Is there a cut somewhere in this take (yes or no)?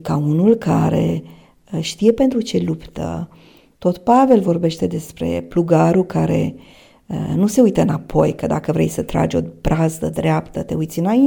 no